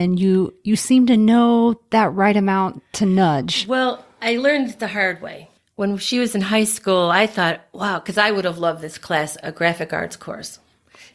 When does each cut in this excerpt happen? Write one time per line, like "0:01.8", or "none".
none

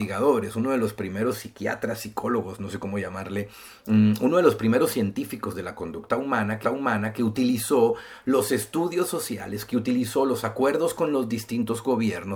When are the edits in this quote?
0:06.6

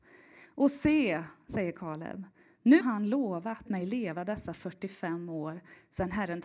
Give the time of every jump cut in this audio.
0:02.8
0:03.7

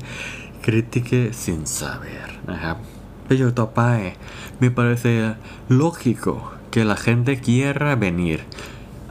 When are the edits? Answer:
none

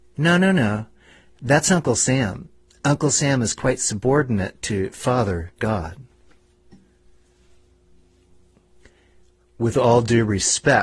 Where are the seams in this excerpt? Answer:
none

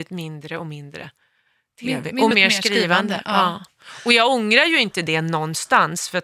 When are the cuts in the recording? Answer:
0:02.3

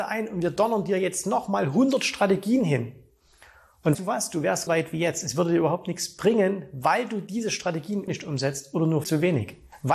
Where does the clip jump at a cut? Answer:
0:03.9
0:04.7
0:08.1
0:09.0

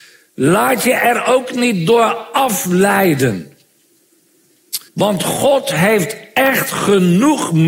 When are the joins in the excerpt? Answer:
0:04.9

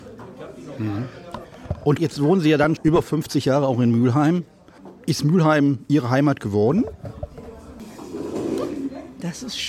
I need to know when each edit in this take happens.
0:02.0
0:02.8

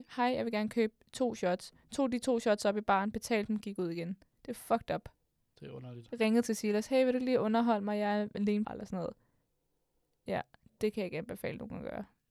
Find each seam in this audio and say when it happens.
0:08.6

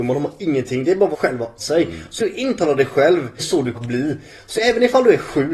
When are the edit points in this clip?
0:01.1
0:01.6
0:02.2
0:03.4
0:03.7
0:04.6

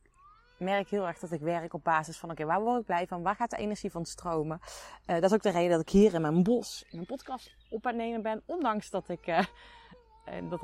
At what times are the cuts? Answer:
none

